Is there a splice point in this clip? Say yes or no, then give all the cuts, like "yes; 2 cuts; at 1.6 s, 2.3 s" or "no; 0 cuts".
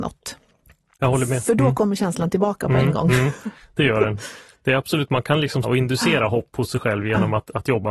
yes; 1 cut; at 5.6 s